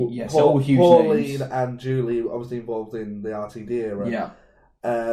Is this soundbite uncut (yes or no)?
yes